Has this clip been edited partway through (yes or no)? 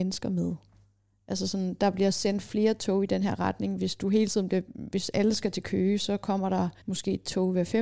yes